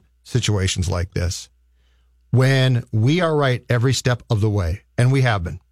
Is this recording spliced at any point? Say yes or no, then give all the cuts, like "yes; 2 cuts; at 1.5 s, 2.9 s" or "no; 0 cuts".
no; 0 cuts